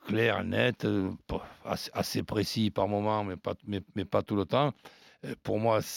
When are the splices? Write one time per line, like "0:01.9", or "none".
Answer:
none